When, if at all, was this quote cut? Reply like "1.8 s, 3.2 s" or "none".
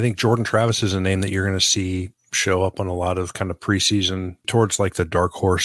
4.4 s